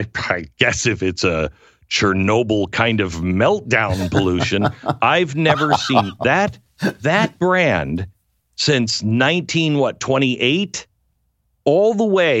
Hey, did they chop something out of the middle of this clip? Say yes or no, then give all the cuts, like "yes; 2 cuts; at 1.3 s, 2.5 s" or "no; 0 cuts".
no; 0 cuts